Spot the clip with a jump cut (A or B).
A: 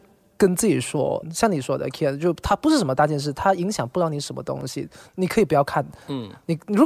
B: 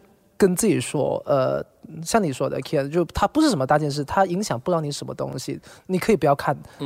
A